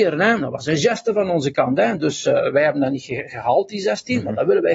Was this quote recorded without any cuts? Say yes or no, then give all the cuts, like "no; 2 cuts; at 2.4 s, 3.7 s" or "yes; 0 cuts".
yes; 0 cuts